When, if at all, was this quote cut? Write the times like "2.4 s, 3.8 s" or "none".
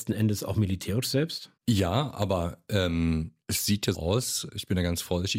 1.6 s, 3.4 s, 3.9 s